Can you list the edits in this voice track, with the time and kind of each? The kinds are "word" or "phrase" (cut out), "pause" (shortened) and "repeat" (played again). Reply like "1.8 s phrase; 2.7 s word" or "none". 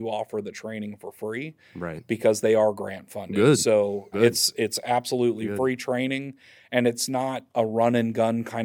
4.1 s word; 7.5 s pause